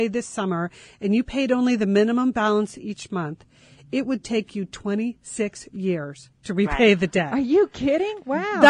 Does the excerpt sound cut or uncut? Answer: uncut